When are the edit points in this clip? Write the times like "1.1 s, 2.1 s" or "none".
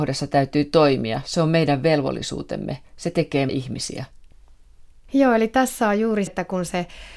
3.5 s, 6.3 s